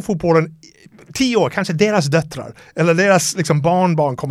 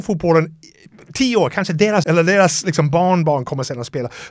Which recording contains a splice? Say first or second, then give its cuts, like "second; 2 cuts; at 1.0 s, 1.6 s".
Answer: second; 1 cut; at 2.0 s